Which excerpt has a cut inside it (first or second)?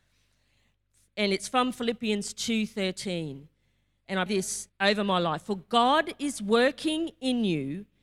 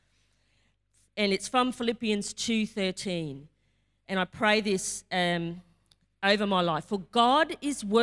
first